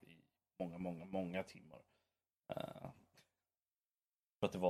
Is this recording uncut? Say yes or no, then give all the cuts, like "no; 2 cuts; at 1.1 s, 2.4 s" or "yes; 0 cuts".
yes; 0 cuts